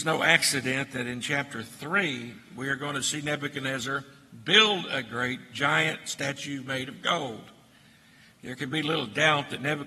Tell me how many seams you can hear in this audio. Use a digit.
0